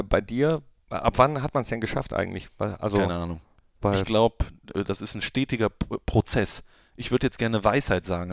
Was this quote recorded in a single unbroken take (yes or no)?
yes